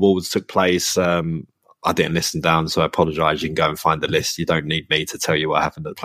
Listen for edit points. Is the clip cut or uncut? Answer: uncut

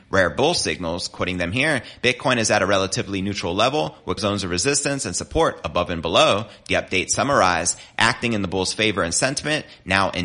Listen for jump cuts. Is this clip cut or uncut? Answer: cut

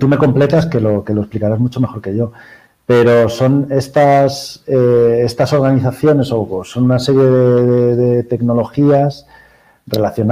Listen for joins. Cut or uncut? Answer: uncut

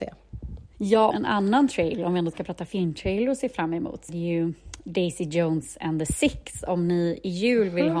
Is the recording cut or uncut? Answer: cut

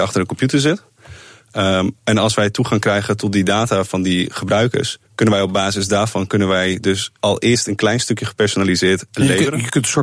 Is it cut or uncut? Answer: cut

